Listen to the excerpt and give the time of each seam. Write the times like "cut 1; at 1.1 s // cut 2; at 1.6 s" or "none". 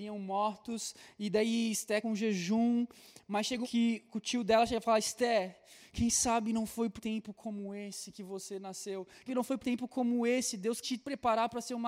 cut 1; at 2.0 s // cut 2; at 3.6 s // cut 3; at 7.0 s // cut 4; at 9.3 s // cut 5; at 9.6 s // cut 6; at 10.8 s